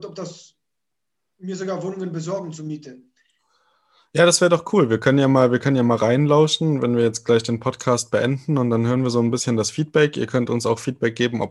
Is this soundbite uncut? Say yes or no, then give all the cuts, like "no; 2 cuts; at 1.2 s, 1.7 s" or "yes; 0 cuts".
yes; 0 cuts